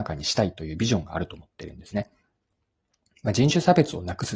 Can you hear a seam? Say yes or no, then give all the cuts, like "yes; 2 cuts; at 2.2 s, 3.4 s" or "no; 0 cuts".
no; 0 cuts